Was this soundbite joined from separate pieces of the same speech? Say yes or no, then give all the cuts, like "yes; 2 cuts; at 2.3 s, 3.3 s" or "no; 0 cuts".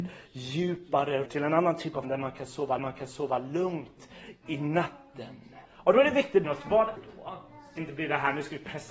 yes; 7 cuts; at 1.3 s, 2.0 s, 2.8 s, 5.6 s, 6.4 s, 7.0 s, 7.8 s